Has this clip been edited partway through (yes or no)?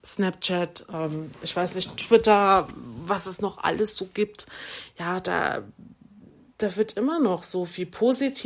no